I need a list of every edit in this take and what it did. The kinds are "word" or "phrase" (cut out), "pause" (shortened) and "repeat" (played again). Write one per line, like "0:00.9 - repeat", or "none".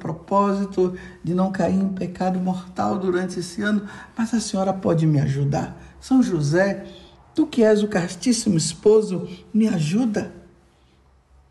none